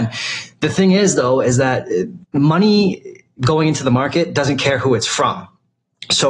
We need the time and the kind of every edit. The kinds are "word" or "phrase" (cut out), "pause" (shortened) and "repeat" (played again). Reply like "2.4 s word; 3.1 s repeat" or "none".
2.2 s pause